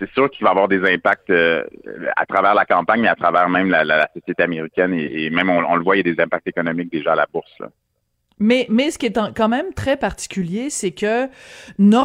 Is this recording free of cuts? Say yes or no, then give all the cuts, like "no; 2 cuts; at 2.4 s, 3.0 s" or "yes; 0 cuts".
yes; 0 cuts